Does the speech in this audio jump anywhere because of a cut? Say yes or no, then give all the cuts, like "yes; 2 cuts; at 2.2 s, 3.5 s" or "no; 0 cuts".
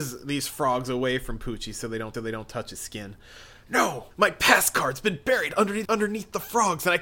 yes; 3 cuts; at 2.1 s, 4.1 s, 5.9 s